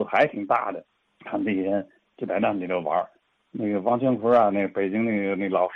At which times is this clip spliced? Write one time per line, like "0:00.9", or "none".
none